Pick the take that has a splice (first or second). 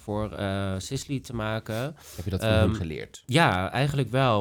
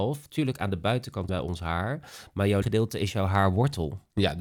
second